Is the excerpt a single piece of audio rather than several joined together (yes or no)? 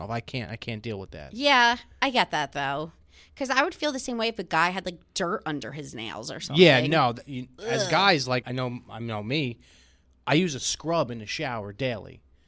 no